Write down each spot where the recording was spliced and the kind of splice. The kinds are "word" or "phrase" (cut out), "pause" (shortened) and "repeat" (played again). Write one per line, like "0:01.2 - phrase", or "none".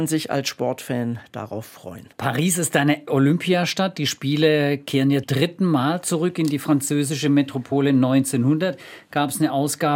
0:02.1 - pause
0:03.1 - word
0:05.2 - word